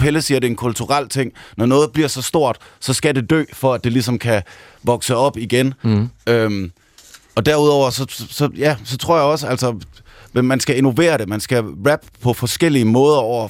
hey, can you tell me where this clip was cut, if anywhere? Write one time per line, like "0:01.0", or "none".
none